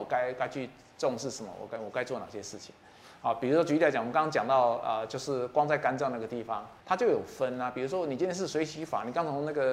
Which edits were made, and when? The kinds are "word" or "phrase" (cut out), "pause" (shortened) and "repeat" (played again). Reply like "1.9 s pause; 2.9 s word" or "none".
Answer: 6.8 s pause

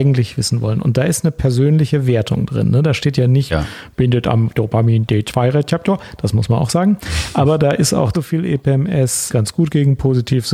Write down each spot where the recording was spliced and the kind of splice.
3.5 s word; 8.1 s phrase; 9.3 s word

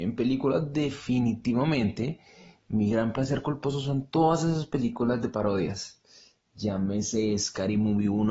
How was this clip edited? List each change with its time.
none

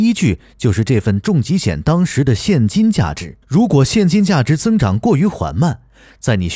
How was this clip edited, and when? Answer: 3.4 s pause

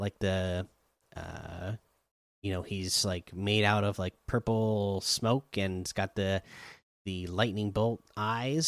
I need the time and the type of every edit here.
none

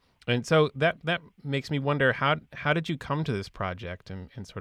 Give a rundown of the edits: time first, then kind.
none

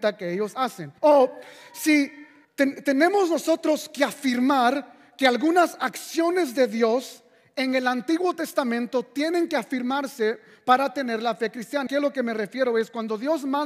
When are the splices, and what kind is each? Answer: 1.0 s pause; 2.4 s pause; 11.9 s word

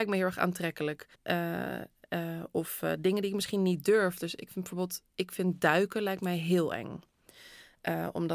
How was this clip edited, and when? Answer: 1.1 s pause

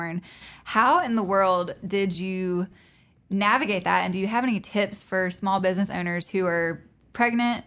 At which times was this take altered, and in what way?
none

